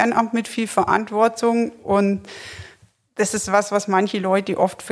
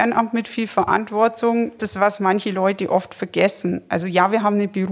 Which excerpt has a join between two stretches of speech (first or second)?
second